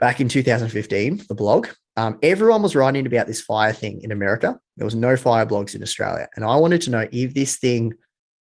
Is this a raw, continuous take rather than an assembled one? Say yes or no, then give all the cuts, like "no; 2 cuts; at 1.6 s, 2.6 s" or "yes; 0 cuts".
yes; 0 cuts